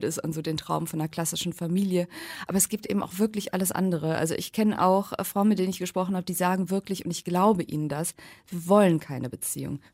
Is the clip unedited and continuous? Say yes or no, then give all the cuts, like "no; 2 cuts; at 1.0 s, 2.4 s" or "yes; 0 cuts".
yes; 0 cuts